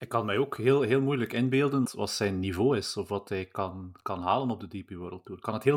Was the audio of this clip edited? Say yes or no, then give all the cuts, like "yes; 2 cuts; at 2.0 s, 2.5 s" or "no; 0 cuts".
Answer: yes; 1 cut; at 1.9 s